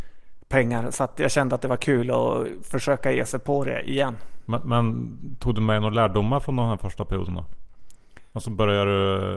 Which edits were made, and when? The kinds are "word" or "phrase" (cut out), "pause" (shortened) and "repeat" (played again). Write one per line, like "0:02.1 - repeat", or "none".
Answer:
none